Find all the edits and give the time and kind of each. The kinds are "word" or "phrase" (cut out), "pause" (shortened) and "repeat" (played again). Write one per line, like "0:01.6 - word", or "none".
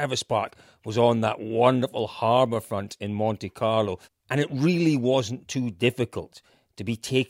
0:04.0 - pause